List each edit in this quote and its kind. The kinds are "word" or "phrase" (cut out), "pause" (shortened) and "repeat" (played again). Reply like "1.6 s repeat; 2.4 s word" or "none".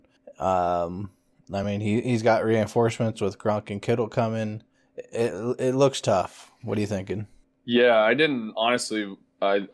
none